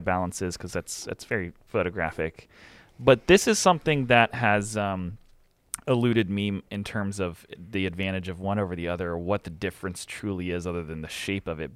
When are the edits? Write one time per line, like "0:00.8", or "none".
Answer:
0:06.7

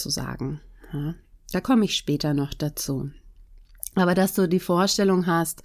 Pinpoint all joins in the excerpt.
none

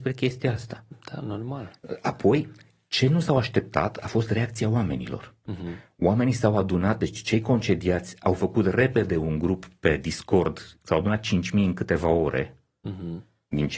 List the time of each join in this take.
none

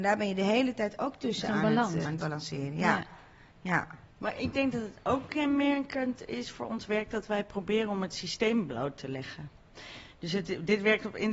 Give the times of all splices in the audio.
0:02.0
0:04.1

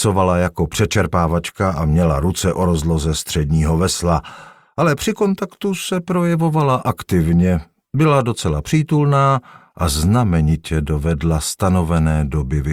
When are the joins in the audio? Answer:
none

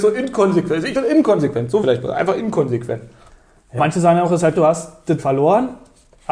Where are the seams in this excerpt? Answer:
0:00.9
0:01.8
0:03.8
0:04.5
0:05.2

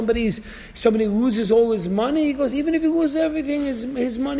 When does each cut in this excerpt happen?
none

